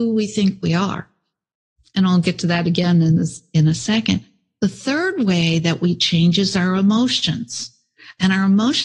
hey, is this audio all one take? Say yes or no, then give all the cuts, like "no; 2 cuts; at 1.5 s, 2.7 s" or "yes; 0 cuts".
yes; 0 cuts